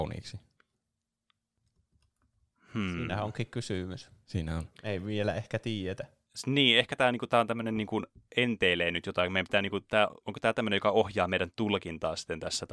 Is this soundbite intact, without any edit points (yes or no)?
yes